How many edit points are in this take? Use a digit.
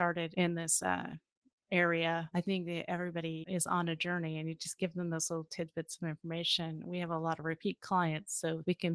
0